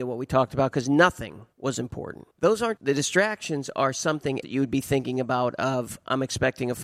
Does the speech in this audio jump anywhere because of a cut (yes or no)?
yes